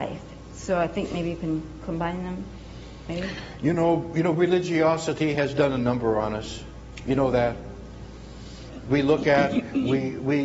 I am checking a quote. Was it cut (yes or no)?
no